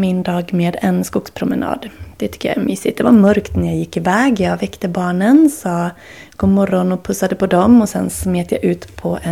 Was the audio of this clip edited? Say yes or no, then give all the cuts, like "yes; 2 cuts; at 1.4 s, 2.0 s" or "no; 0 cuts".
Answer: no; 0 cuts